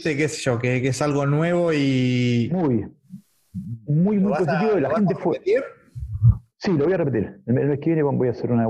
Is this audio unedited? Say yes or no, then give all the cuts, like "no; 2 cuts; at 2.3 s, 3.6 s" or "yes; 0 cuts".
yes; 0 cuts